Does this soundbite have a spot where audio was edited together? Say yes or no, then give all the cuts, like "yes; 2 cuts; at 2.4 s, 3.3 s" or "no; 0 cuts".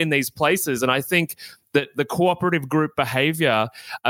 no; 0 cuts